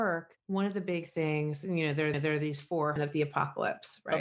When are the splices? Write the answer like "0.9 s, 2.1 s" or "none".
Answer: 2.1 s, 3.0 s